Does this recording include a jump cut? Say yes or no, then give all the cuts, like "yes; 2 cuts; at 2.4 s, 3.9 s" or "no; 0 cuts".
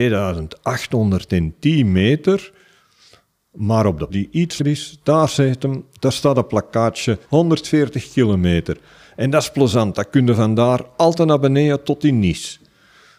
yes; 3 cuts; at 4.1 s, 4.6 s, 7.2 s